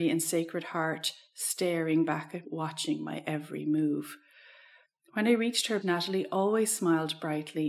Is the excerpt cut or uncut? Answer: cut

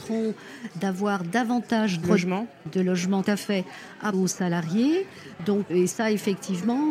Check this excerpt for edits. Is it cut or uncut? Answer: cut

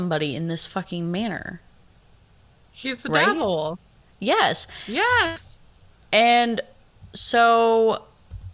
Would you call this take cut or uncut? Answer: uncut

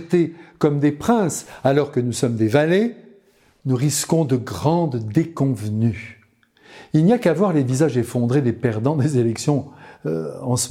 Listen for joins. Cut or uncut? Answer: uncut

